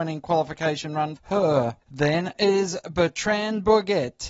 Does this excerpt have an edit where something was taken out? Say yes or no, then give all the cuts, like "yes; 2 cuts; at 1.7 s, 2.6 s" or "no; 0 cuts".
yes; 2 cuts; at 1.2 s, 1.8 s